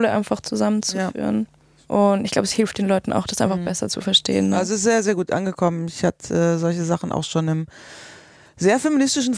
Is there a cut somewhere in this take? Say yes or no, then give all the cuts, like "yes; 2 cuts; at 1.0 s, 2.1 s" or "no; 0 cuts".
no; 0 cuts